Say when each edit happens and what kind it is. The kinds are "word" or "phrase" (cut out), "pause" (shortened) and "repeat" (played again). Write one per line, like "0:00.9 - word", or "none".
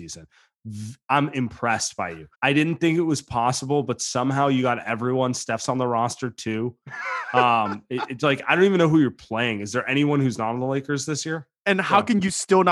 0:02.3 - pause